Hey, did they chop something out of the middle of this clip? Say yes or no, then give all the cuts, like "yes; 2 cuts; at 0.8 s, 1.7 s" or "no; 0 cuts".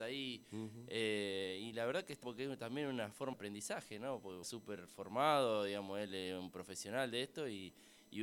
yes; 4 cuts; at 1.7 s, 2.2 s, 3.3 s, 4.4 s